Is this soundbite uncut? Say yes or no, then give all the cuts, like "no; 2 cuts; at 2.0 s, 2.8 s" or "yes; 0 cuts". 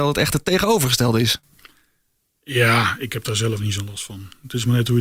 yes; 0 cuts